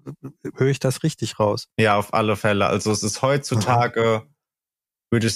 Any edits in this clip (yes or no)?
yes